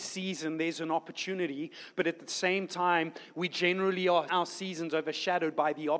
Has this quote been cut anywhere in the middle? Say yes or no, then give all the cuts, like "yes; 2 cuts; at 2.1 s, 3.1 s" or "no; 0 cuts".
yes; 1 cut; at 4.3 s